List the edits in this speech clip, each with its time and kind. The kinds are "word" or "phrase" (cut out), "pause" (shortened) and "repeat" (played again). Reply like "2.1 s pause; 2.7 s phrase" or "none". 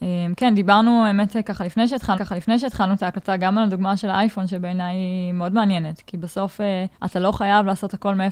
2.1 s repeat; 6.9 s pause